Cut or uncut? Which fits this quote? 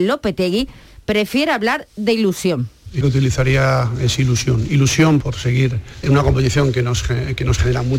cut